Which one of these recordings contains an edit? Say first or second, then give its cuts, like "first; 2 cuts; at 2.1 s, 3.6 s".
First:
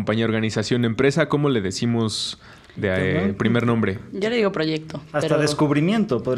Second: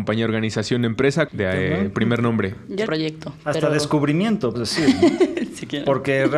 second; 3 cuts; at 1.3 s, 2.9 s, 4.5 s